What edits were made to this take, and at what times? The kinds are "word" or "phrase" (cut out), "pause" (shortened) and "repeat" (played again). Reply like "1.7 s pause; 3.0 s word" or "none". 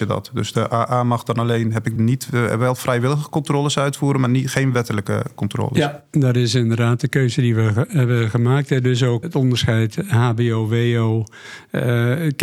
2.0 s word; 9.2 s word